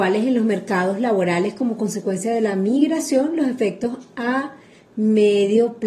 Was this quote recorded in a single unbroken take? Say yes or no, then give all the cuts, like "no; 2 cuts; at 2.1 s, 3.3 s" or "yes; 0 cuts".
yes; 0 cuts